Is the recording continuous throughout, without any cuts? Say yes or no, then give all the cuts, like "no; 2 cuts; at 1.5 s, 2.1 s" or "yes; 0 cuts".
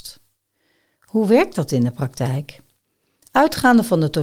yes; 0 cuts